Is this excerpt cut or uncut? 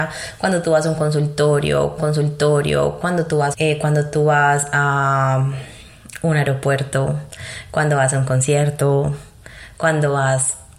cut